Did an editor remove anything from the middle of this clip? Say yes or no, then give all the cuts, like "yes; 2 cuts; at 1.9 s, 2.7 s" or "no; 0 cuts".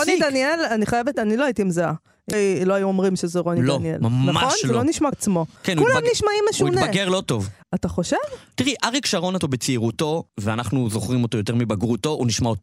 yes; 6 cuts; at 1.1 s, 2.3 s, 5.1 s, 5.6 s, 9.4 s, 10.3 s